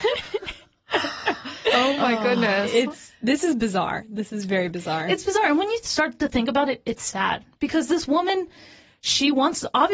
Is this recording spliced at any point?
no; 0 cuts

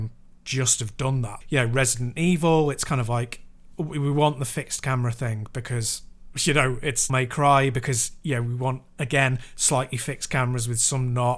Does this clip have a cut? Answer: yes; 2 cuts; at 1.4 s, 7.1 s

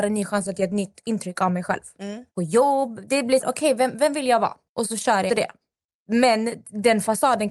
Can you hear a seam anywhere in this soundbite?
yes; 4 cuts; at 2.3 s, 3.4 s, 4.7 s, 5.3 s

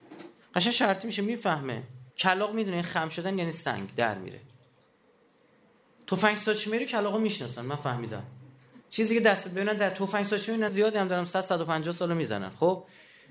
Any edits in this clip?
yes; 3 cuts; at 2.1 s, 8.8 s, 10.7 s

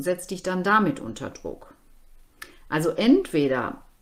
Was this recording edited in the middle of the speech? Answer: no; 0 cuts

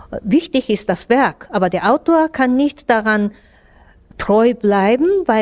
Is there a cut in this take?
no; 0 cuts

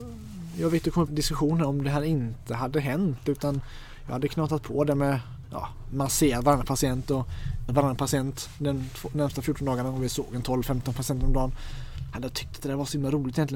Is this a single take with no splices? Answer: no; 2 cuts; at 1.1 s, 7.7 s

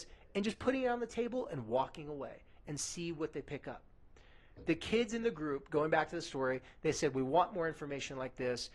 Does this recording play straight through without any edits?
yes; 0 cuts

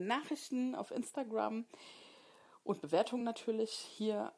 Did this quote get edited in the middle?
no; 0 cuts

